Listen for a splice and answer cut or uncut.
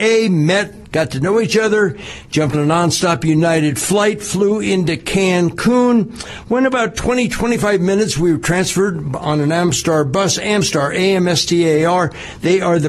cut